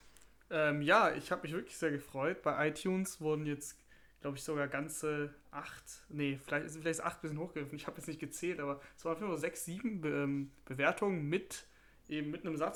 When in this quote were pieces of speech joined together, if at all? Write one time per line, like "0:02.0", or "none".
none